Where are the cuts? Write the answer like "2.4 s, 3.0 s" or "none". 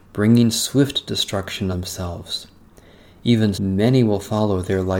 1.7 s, 3.5 s